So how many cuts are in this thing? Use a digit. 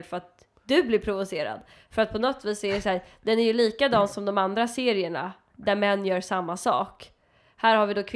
0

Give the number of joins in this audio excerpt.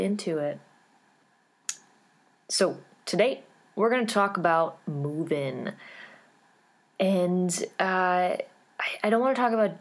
0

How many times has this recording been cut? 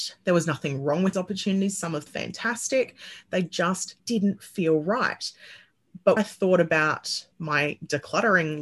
5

